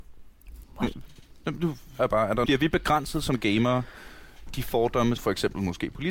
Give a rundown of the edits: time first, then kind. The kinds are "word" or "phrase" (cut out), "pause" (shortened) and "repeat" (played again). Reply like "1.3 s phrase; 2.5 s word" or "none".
2.0 s word; 2.4 s word; 4.5 s word; 5.2 s word